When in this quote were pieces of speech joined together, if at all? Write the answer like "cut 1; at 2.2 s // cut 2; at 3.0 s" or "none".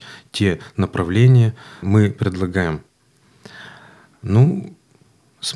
cut 1; at 1.8 s